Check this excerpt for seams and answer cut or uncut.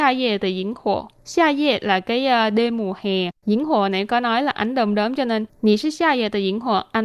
cut